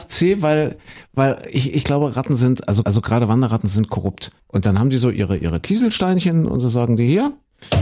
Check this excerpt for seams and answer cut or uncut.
cut